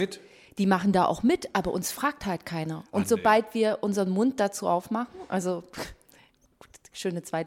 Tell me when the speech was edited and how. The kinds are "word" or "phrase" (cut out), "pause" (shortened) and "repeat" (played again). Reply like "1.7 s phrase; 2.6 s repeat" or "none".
none